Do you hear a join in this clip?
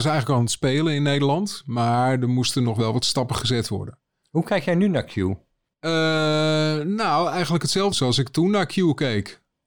yes; 1 cut; at 7.9 s

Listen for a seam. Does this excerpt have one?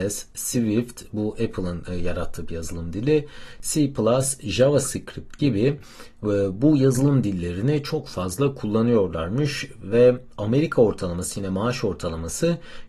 no; 0 cuts

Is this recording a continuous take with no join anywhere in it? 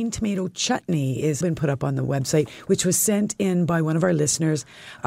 no; 1 cut; at 1.4 s

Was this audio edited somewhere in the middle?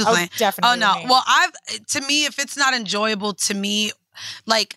no; 0 cuts

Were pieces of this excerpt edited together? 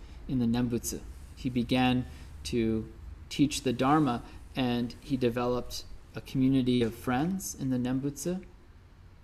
no; 0 cuts

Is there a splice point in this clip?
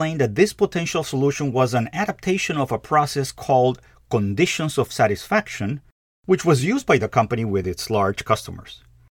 no; 0 cuts

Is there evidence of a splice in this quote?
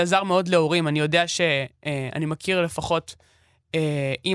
no; 0 cuts

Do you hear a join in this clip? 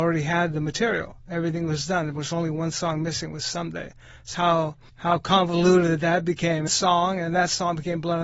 yes; 3 cuts; at 4.3 s, 4.9 s, 6.7 s

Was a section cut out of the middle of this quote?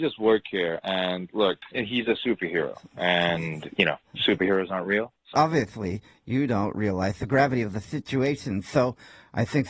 yes; 2 cuts; at 1.7 s, 5.3 s

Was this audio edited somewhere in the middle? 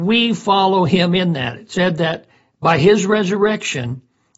no; 0 cuts

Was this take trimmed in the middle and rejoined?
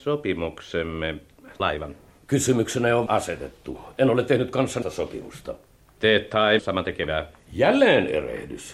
yes; 4 cuts; at 1.6 s, 3.1 s, 4.8 s, 6.6 s

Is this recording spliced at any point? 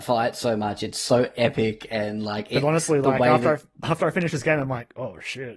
no; 0 cuts

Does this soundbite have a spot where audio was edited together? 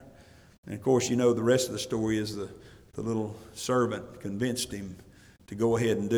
no; 0 cuts

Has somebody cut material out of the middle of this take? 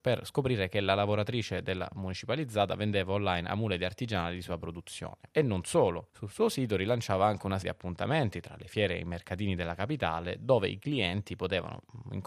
yes; 3 cuts; at 5.3 s, 6.1 s, 7.6 s

